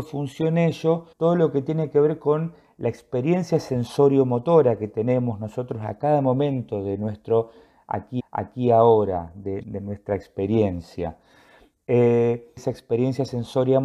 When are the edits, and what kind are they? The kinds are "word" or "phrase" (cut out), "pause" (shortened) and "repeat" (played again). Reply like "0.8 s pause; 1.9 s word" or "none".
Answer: 1.1 s pause; 8.2 s repeat; 9.6 s word; 12.6 s phrase